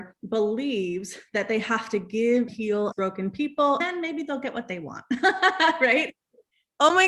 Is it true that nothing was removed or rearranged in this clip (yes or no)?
no